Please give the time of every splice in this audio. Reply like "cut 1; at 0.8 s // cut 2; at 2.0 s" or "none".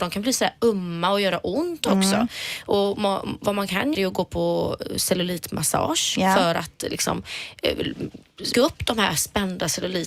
cut 1; at 3.9 s // cut 2; at 8.5 s